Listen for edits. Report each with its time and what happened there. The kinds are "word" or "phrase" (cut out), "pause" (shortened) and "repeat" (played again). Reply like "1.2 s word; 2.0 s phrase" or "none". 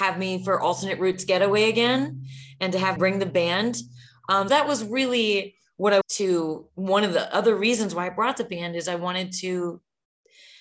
3.0 s word; 4.5 s word; 6.0 s word